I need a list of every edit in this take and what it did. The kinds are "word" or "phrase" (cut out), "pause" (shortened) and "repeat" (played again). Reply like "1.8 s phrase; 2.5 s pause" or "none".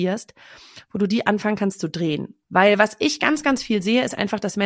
2.4 s pause

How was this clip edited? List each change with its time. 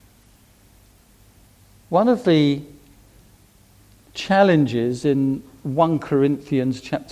none

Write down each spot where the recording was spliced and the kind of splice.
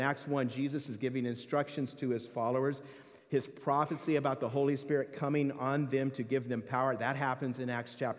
none

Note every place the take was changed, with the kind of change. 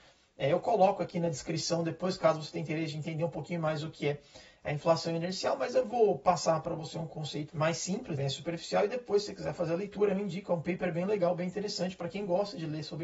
7.5 s word; 8.1 s word

